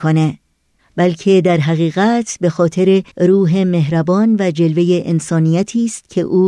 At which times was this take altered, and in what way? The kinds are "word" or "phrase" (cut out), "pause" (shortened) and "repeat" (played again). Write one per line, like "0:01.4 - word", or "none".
0:03.1 - pause